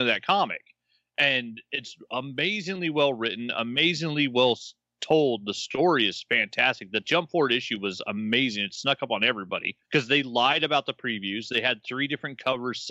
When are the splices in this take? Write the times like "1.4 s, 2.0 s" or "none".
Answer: 9.8 s